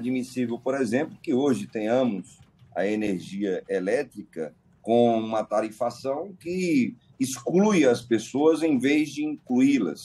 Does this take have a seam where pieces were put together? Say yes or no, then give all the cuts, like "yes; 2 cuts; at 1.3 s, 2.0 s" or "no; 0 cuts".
no; 0 cuts